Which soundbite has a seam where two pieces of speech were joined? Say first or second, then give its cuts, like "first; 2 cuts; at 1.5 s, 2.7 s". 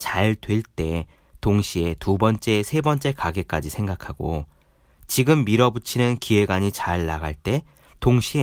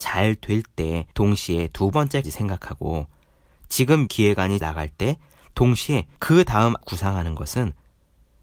second; 7 cuts; at 1.1 s, 1.9 s, 2.2 s, 4.1 s, 4.6 s, 6.2 s, 6.8 s